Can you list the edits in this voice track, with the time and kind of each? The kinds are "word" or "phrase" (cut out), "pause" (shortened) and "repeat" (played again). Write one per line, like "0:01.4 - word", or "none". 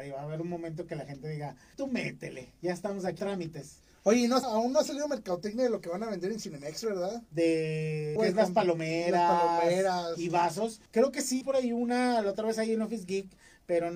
0:01.7 - word
0:03.2 - word
0:04.4 - word
0:08.2 - phrase
0:10.9 - pause
0:11.4 - word